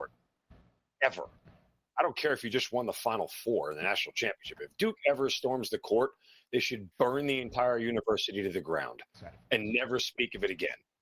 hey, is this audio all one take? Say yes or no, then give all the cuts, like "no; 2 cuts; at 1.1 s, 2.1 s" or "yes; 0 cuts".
yes; 0 cuts